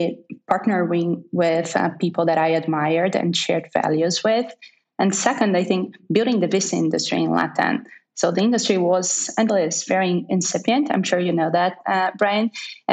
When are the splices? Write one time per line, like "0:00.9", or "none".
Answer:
0:09.5